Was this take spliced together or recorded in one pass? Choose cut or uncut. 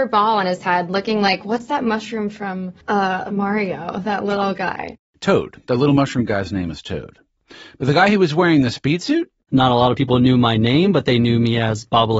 cut